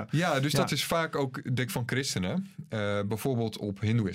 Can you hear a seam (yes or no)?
yes